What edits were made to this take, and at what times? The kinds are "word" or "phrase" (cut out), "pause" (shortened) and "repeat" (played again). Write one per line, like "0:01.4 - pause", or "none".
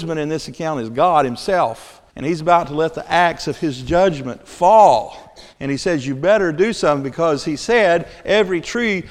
0:02.1 - pause
0:05.5 - pause